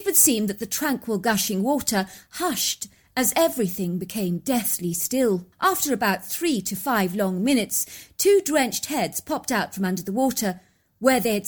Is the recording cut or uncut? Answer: cut